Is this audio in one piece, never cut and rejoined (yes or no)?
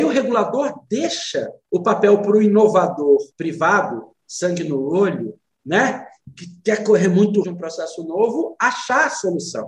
no